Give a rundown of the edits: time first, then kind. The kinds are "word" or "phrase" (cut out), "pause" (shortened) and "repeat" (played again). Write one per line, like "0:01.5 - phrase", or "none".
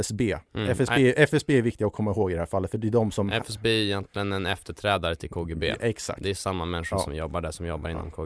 none